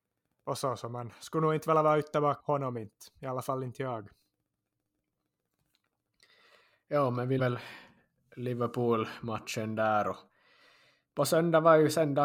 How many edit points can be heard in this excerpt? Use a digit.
2